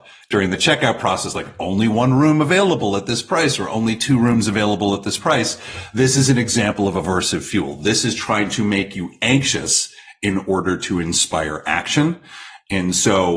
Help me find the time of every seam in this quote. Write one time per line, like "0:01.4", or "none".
none